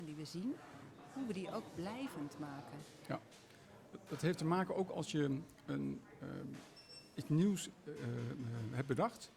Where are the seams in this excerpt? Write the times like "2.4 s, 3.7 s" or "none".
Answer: none